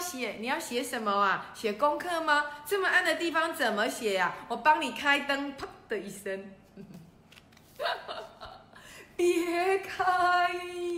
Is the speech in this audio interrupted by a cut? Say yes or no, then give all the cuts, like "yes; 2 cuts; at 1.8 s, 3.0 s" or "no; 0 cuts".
no; 0 cuts